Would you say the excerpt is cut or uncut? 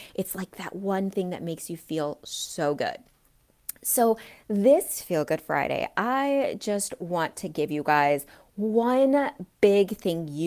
uncut